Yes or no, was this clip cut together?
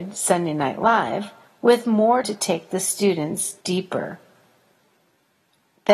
yes